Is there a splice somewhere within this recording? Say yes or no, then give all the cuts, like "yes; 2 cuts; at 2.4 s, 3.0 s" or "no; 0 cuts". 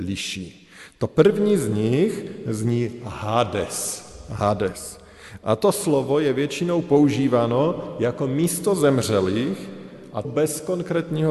yes; 1 cut; at 10.2 s